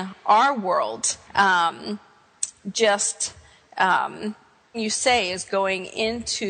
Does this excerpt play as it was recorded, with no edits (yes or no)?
no